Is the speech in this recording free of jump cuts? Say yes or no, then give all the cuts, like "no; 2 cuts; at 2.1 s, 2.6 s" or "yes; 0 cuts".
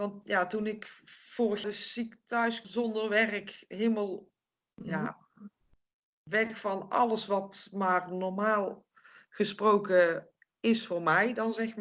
no; 2 cuts; at 1.6 s, 2.6 s